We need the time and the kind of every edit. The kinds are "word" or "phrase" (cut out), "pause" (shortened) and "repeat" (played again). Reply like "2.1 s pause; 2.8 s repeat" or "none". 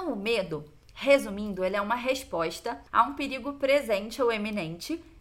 2.9 s pause